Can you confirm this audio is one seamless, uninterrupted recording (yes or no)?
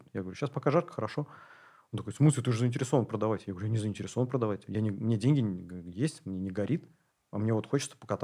yes